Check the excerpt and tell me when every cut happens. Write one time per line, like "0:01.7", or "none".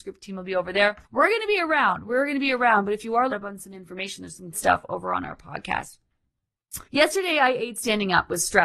0:01.0
0:03.3
0:04.5
0:06.8